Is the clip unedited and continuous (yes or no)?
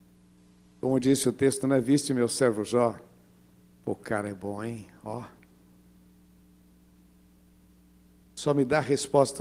yes